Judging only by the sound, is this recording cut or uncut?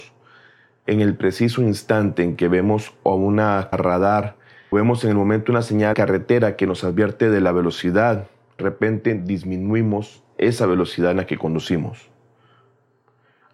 cut